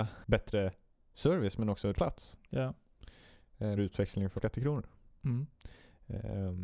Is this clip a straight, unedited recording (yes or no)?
no